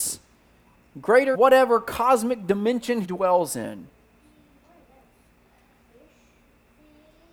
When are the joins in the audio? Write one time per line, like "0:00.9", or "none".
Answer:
0:01.3
0:03.0